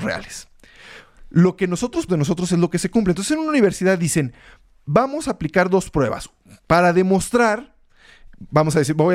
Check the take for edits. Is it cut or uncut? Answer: cut